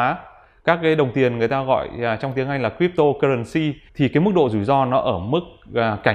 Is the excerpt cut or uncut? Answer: cut